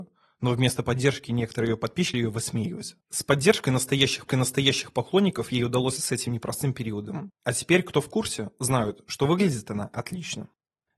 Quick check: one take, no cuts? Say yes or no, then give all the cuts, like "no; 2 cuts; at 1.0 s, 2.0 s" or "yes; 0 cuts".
no; 5 cuts; at 2.1 s, 3.0 s, 4.3 s, 6.0 s, 7.4 s